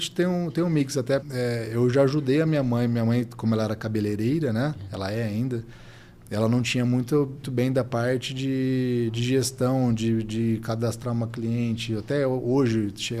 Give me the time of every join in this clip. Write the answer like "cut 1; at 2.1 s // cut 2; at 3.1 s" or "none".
cut 1; at 1.2 s // cut 2; at 7.4 s